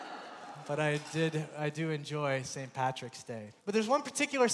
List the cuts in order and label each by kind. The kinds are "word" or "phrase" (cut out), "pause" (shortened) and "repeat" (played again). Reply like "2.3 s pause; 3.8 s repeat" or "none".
3.6 s pause